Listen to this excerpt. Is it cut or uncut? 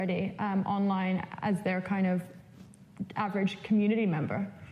uncut